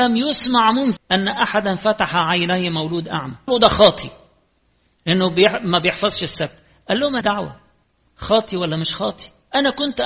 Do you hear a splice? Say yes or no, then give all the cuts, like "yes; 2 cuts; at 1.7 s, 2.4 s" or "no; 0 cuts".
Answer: yes; 3 cuts; at 1.0 s, 3.5 s, 7.2 s